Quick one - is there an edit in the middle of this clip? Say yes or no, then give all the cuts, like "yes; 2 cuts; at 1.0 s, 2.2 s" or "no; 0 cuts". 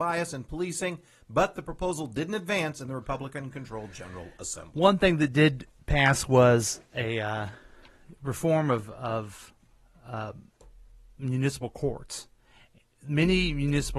no; 0 cuts